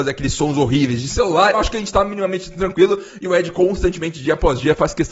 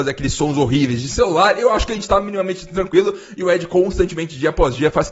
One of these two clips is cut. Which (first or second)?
first